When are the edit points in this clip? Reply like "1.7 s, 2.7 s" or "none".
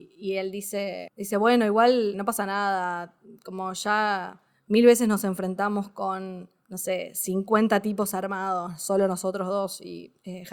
2.1 s